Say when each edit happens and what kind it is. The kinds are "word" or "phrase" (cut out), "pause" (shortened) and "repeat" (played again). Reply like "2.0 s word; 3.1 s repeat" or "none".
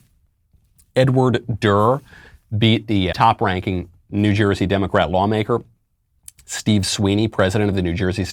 3.1 s word

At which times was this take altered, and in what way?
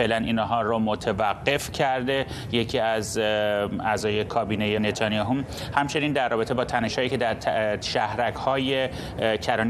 4.8 s word

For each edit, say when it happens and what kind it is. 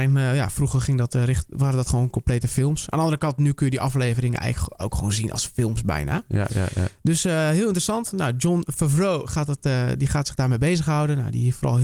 none

